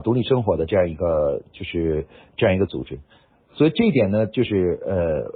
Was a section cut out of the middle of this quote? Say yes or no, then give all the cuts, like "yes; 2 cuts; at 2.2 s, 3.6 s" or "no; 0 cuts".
no; 0 cuts